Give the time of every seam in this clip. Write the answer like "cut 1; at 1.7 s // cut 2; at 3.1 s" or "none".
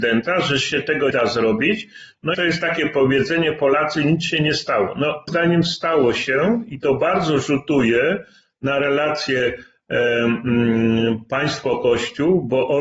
cut 1; at 1.1 s // cut 2; at 2.3 s // cut 3; at 5.3 s